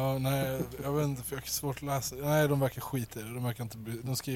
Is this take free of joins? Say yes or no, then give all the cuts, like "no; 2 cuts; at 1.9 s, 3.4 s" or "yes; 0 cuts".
yes; 0 cuts